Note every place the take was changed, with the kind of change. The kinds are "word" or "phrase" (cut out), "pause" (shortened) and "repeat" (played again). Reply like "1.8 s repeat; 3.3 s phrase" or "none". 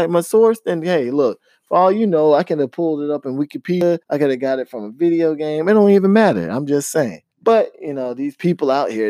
4.0 s pause; 7.3 s pause